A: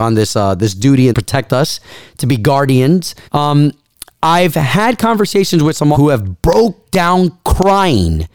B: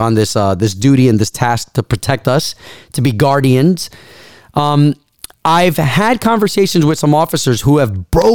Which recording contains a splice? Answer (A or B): A